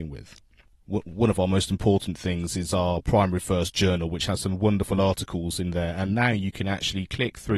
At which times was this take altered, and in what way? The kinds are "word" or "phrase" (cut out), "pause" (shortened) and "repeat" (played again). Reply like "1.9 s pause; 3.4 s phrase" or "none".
none

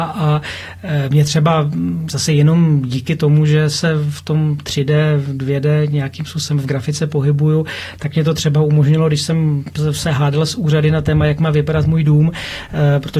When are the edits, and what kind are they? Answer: none

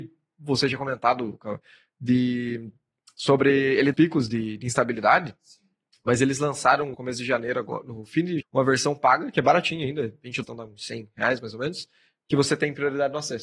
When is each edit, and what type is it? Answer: 3.9 s phrase; 6.9 s word; 8.4 s word; 10.4 s word

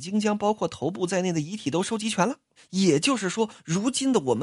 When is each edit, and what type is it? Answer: 2.6 s pause

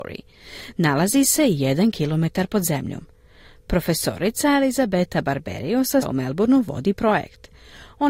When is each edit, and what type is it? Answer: 6.0 s word

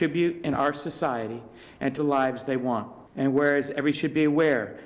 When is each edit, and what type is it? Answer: 2.0 s word; 3.1 s pause; 3.9 s word

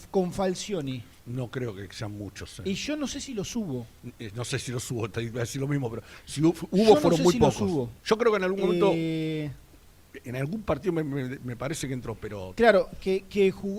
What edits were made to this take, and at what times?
1.2 s pause; 8.0 s pause

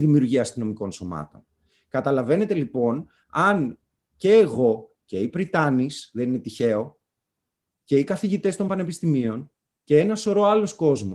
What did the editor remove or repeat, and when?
none

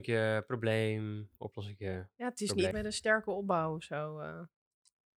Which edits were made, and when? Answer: 2.7 s word

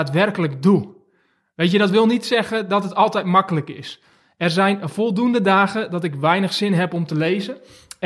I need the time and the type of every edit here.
none

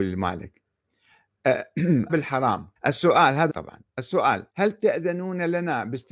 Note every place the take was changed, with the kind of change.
2.1 s phrase; 2.8 s pause; 3.5 s word; 4.5 s pause

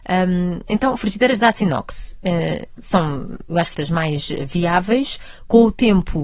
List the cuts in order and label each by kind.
3.7 s word

